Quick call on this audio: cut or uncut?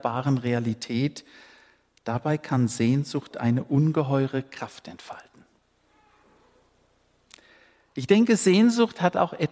uncut